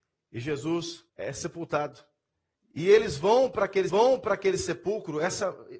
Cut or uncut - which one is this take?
cut